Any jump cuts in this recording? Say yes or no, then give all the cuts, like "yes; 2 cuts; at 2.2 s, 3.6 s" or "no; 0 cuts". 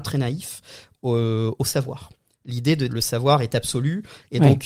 yes; 1 cut; at 2.9 s